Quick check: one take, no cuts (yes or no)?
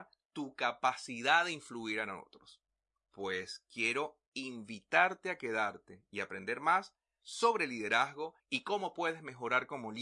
no